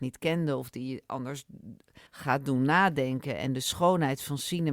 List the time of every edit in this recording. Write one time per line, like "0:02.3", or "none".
0:02.1